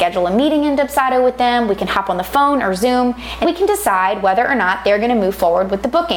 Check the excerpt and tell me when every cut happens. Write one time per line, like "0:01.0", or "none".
0:03.4

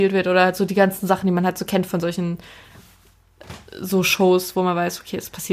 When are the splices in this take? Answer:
none

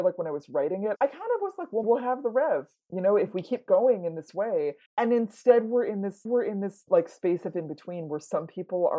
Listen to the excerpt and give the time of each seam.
0:01.8
0:04.9
0:06.3

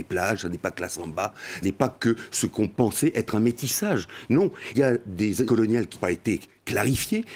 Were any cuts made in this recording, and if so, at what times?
0:01.6
0:04.7
0:05.5
0:05.9

